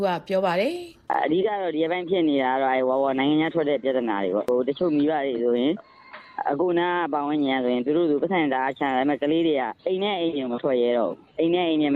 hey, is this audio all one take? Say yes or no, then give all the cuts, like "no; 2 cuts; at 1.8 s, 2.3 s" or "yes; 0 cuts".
no; 2 cuts; at 1.1 s, 9.8 s